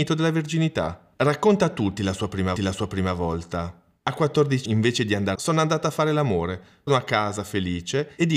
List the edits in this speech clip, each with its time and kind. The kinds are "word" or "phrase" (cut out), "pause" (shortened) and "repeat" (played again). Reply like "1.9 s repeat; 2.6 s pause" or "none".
1.1 s pause; 2.6 s repeat; 4.6 s word; 5.3 s phrase; 6.9 s word